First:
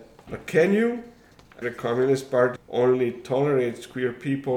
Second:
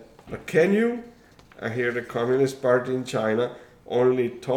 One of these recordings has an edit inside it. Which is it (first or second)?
first